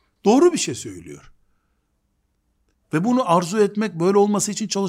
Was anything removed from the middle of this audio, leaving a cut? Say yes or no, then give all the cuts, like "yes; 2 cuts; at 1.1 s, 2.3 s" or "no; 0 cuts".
no; 0 cuts